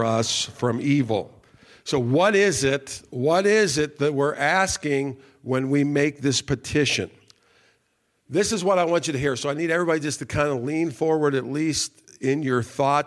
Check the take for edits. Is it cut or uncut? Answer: uncut